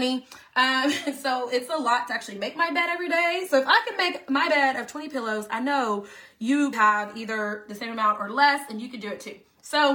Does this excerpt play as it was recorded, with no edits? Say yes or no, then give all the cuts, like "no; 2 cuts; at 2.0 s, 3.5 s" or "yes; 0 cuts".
no; 1 cut; at 6.7 s